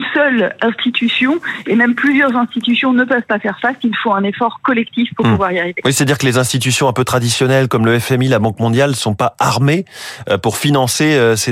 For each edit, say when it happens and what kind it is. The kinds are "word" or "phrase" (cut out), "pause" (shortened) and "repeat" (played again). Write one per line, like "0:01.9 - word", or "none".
none